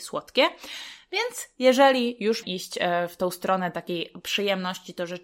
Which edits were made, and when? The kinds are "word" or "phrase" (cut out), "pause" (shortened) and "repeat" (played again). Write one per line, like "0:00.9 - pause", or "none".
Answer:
0:02.4 - word